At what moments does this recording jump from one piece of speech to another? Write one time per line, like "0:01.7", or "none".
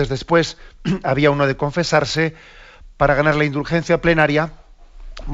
none